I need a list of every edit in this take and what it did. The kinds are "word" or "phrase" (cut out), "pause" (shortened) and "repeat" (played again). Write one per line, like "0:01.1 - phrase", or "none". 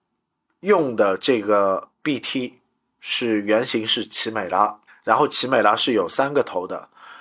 0:01.9 - pause
0:04.9 - pause